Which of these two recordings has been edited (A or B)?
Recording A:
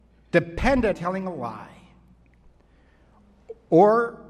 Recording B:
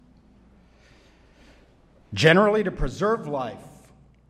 A